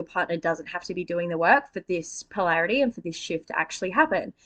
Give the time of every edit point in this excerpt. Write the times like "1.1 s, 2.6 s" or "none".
none

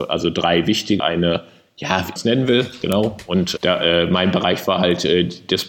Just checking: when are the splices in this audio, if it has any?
1.0 s, 2.2 s, 3.6 s

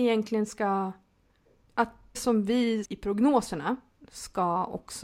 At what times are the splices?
2.1 s, 2.8 s

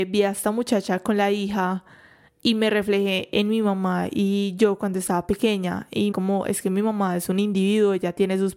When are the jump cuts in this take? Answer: 6.1 s

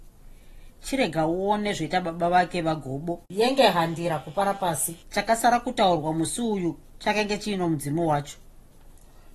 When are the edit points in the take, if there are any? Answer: 3.2 s, 5.0 s

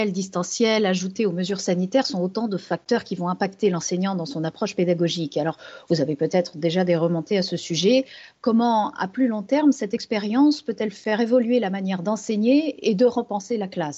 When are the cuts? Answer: none

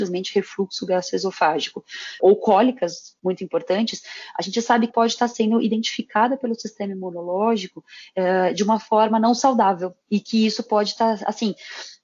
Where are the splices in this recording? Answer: 2.2 s, 4.9 s, 10.0 s

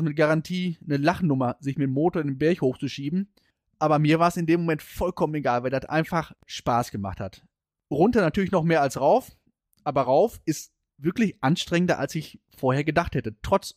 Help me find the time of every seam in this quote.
none

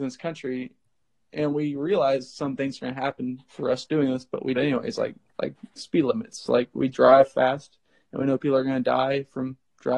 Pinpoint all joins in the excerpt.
2.6 s, 4.6 s, 5.8 s

